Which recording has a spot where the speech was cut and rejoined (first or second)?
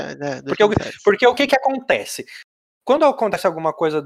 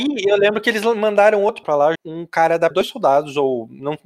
second